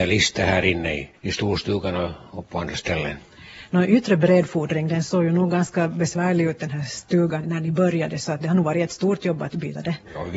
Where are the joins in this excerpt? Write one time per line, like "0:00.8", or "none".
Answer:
0:01.1
0:07.4